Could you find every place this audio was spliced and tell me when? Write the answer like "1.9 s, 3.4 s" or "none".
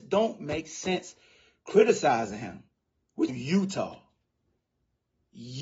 3.3 s